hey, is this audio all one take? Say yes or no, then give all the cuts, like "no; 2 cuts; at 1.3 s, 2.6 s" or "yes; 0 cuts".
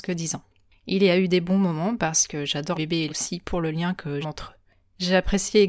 no; 3 cuts; at 2.7 s, 3.1 s, 4.2 s